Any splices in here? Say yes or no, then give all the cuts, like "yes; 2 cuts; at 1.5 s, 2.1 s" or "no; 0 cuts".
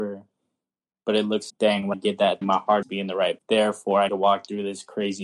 yes; 6 cuts; at 1.5 s, 1.9 s, 2.4 s, 2.8 s, 3.4 s, 4.1 s